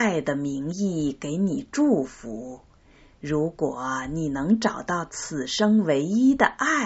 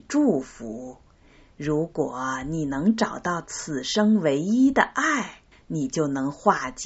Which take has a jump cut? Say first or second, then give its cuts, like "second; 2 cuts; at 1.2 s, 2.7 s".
second; 1 cut; at 5.5 s